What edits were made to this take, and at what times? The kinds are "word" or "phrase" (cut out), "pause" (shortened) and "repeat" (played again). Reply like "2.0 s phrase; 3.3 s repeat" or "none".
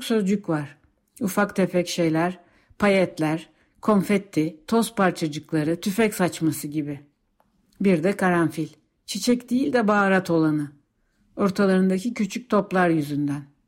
none